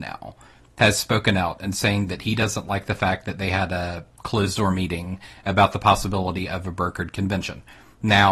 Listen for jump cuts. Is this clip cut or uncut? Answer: uncut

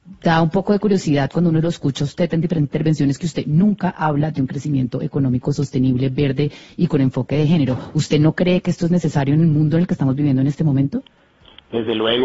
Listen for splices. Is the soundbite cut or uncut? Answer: uncut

